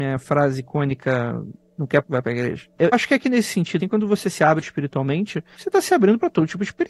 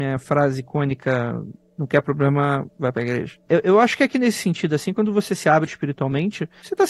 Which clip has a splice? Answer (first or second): first